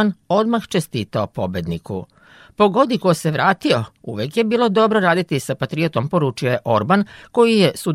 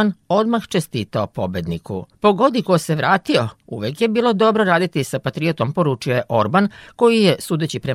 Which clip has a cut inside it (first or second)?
second